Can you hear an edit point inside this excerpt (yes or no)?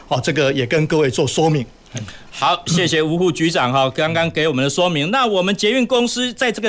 no